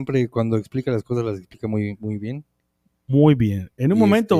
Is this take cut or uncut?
uncut